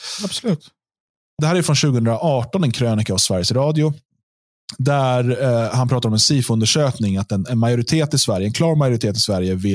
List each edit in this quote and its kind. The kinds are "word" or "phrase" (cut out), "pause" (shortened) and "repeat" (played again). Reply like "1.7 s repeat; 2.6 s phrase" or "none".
1.4 s phrase